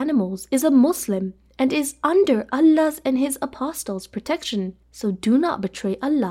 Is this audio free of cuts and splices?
no; 1 cut; at 4.8 s

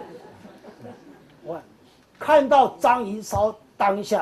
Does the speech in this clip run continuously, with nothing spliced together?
yes; 0 cuts

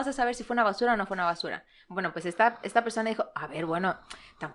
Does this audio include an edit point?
no; 0 cuts

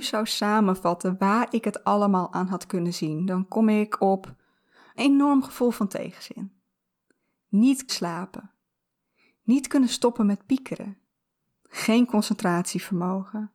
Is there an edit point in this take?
yes; 3 cuts; at 4.9 s, 7.9 s, 11.4 s

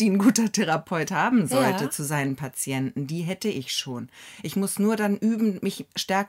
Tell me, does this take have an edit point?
no; 0 cuts

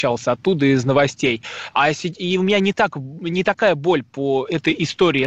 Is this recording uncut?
yes; 0 cuts

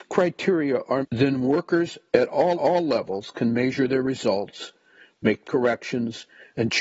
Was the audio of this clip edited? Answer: yes; 3 cuts; at 1.0 s, 2.5 s, 5.4 s

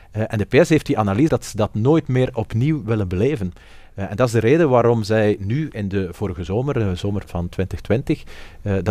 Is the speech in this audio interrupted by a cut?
yes; 2 cuts; at 1.3 s, 7.2 s

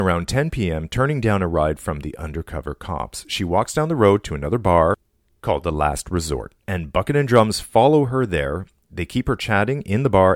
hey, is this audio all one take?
yes; 0 cuts

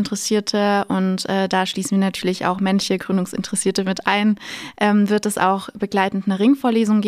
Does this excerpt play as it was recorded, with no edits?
yes; 0 cuts

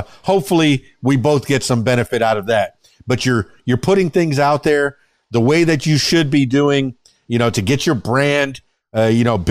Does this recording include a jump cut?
no; 0 cuts

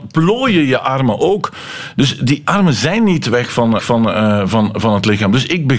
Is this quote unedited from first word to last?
no; 2 cuts; at 2.4 s, 3.8 s

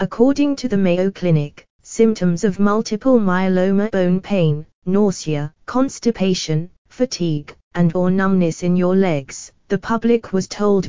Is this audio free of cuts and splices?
no; 4 cuts; at 3.9 s, 5.6 s, 7.9 s, 9.6 s

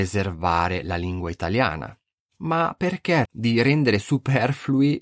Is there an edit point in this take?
yes; 1 cut; at 3.2 s

